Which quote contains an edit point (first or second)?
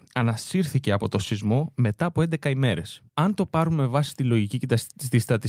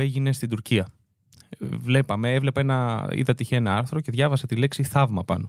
first